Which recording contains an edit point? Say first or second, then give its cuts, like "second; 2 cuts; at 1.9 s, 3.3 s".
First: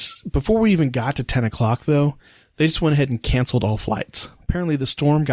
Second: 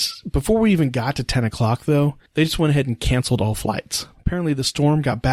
second; 1 cut; at 2.3 s